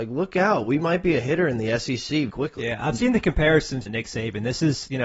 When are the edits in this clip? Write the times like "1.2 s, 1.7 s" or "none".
2.3 s, 3.9 s